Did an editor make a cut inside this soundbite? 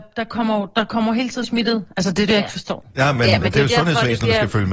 yes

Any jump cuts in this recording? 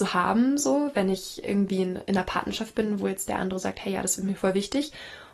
no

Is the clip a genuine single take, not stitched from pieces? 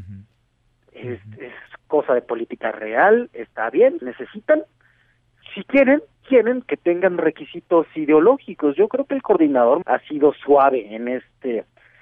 no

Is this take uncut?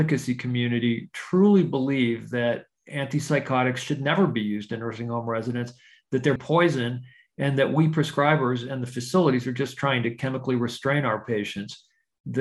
no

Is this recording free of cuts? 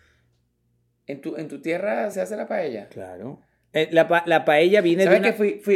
yes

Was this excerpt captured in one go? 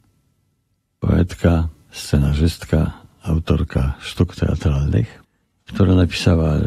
yes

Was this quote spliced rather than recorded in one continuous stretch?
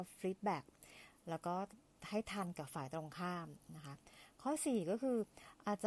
yes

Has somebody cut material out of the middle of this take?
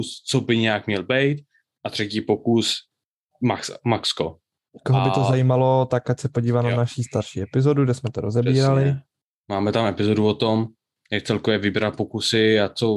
no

